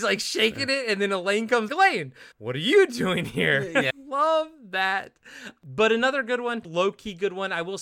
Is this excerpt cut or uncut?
cut